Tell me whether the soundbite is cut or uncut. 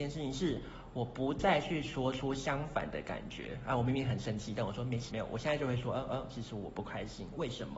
cut